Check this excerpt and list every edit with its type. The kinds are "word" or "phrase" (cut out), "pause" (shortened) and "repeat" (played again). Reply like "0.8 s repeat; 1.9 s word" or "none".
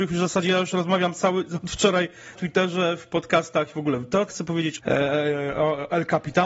2.4 s word; 4.3 s word; 4.8 s word